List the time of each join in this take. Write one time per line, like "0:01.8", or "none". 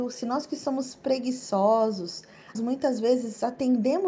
0:02.5